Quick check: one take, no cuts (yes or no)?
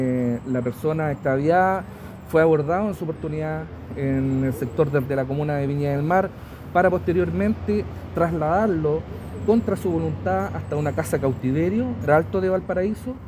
no